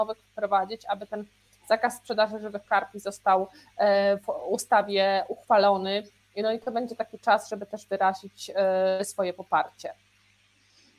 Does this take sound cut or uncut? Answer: uncut